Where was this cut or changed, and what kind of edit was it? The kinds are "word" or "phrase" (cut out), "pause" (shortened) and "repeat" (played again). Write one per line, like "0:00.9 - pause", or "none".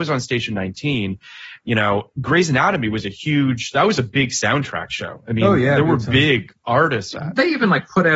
0:07.1 - phrase